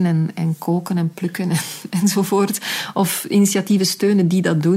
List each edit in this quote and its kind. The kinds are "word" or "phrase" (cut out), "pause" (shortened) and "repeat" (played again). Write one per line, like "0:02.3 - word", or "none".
none